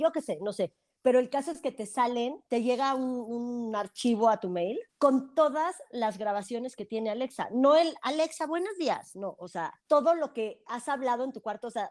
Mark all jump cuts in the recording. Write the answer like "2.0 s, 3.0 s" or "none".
4.9 s, 9.8 s